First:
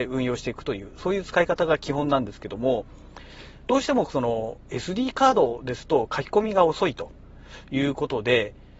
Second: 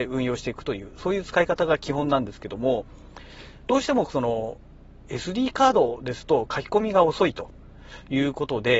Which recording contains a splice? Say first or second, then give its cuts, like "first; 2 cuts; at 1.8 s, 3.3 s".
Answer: first; 1 cut; at 4.6 s